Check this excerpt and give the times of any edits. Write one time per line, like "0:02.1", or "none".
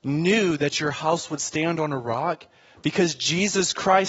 none